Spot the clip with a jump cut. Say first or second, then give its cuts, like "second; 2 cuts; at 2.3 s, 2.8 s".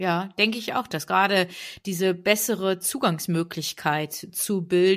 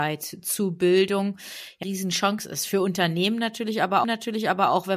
second; 2 cuts; at 1.8 s, 4.0 s